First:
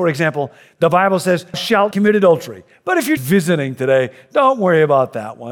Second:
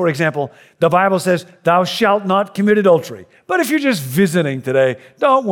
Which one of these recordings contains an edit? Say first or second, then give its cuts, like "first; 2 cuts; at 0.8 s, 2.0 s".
first; 3 cuts; at 1.5 s, 1.9 s, 3.2 s